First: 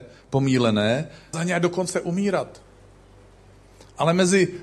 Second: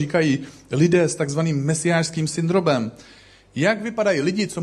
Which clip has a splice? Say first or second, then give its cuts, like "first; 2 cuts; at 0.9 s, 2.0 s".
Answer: first; 1 cut; at 1.3 s